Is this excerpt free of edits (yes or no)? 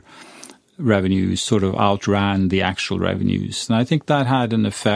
yes